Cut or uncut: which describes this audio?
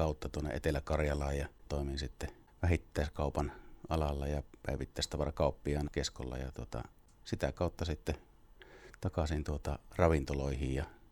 cut